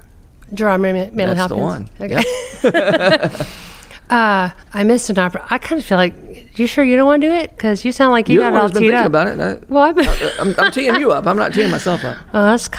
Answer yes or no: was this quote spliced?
yes